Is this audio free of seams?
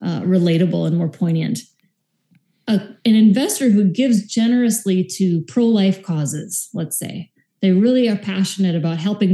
yes; 0 cuts

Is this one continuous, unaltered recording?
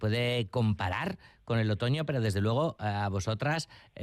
yes; 0 cuts

